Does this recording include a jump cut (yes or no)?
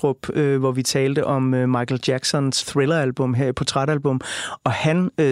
yes